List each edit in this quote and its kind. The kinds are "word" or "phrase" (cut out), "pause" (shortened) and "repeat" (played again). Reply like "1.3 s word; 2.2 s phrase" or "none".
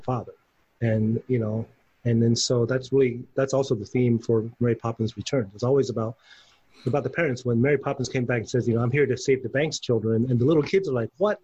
none